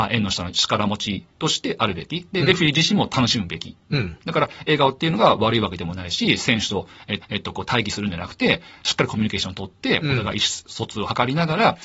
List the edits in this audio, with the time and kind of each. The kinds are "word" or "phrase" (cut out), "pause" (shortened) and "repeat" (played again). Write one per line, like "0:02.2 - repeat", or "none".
0:07.2 - repeat